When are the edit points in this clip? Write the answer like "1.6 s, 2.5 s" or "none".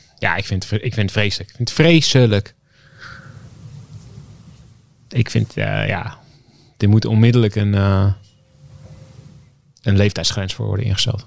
none